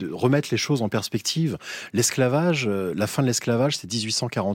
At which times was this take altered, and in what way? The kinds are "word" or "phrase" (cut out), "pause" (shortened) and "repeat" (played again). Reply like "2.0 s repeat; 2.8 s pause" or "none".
none